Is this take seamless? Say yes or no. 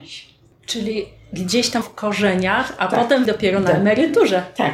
no